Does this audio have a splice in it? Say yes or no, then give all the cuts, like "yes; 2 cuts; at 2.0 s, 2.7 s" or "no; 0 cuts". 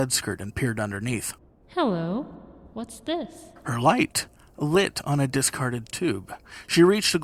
no; 0 cuts